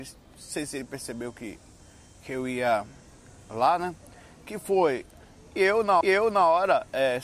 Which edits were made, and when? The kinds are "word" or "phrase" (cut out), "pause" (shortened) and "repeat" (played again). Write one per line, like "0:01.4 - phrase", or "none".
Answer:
0:06.0 - repeat

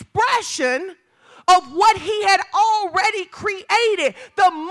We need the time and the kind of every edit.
none

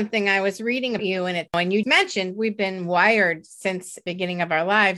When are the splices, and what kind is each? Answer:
0:01.0 - word
0:01.5 - word
0:01.8 - word

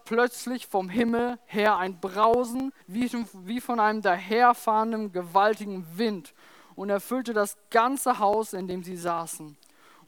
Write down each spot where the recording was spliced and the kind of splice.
0:02.8 - pause

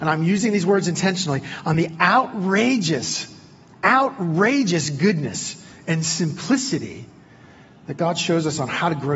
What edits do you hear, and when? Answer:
none

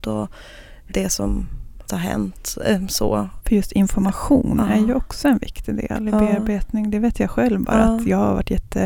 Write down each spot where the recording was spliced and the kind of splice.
0:01.9 - word

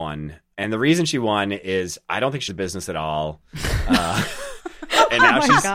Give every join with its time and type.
0:02.5 - word

